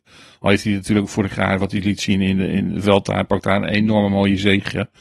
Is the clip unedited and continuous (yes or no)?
yes